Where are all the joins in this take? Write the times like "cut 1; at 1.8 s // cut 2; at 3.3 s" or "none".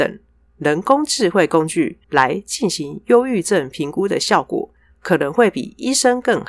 cut 1; at 2.0 s